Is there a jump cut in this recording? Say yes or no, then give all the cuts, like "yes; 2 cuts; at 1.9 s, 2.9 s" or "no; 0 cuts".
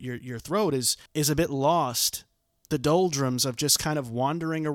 yes; 2 cuts; at 1.1 s, 2.5 s